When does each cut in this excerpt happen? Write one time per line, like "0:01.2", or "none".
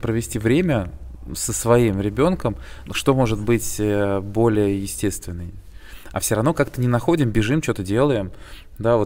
0:02.9